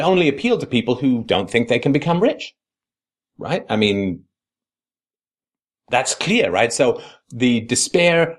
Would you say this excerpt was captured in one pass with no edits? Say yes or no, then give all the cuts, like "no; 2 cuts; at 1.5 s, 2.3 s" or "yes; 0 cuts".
yes; 0 cuts